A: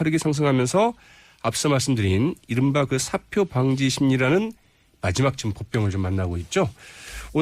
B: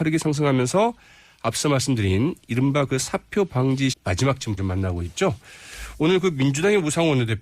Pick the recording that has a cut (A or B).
B